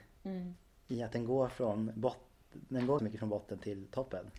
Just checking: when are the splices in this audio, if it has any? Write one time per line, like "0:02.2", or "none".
0:03.0

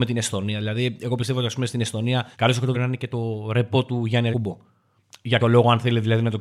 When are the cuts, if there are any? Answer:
0:02.3
0:02.7
0:04.3
0:05.4

